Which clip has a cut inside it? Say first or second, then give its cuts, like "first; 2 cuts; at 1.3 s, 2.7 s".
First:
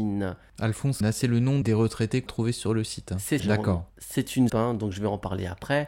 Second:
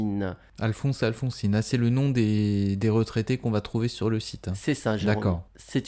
first; 5 cuts; at 1.0 s, 1.6 s, 2.3 s, 3.4 s, 4.5 s